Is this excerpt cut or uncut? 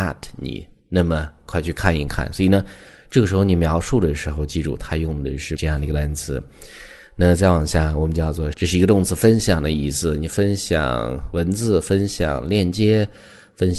cut